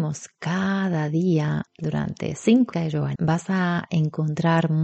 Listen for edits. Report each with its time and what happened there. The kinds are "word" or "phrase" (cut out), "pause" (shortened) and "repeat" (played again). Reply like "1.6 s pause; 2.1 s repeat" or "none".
1.7 s pause; 2.7 s phrase; 3.2 s word